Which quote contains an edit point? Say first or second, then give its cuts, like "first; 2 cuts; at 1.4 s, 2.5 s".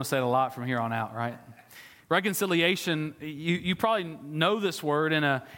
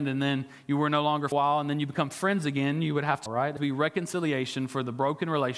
second; 3 cuts; at 1.3 s, 3.3 s, 3.6 s